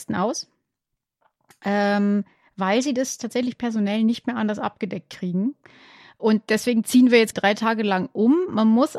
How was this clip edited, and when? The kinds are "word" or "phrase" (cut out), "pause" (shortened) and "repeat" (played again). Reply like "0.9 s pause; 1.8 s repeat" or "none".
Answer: none